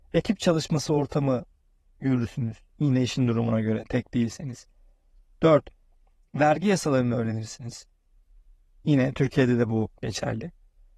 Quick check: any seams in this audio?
no; 0 cuts

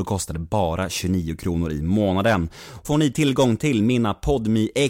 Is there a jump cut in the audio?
yes; 1 cut; at 2.8 s

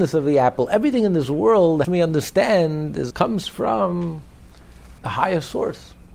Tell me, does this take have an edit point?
yes; 3 cuts; at 1.8 s, 3.1 s, 5.0 s

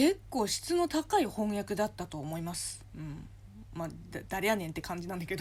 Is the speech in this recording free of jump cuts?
yes; 0 cuts

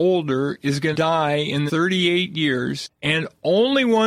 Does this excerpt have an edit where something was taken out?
yes; 2 cuts; at 0.9 s, 1.7 s

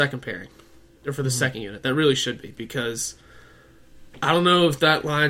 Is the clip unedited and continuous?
yes; 0 cuts

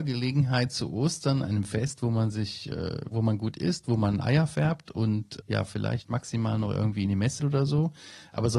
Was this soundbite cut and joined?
yes; 3 cuts; at 3.1 s, 5.4 s, 7.4 s

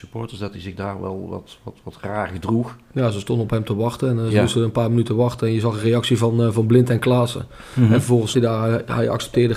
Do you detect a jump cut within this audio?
yes; 1 cut; at 8.3 s

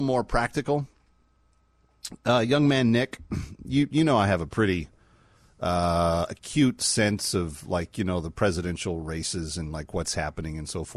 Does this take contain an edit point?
no; 0 cuts

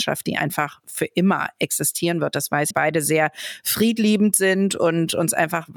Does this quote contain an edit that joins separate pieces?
yes; 1 cut; at 2.7 s

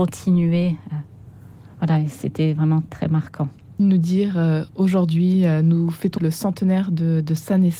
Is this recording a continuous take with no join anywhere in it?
no; 3 cuts; at 2.9 s, 3.8 s, 6.2 s

